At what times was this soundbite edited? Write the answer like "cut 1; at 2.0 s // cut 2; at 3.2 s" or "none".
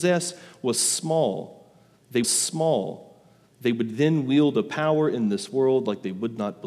cut 1; at 2.2 s